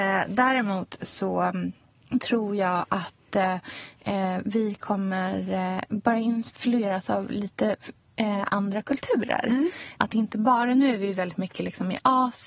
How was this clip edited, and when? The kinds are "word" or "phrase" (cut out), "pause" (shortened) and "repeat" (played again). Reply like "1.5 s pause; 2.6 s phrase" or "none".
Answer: none